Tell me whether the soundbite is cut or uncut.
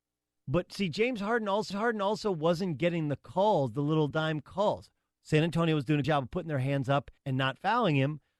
cut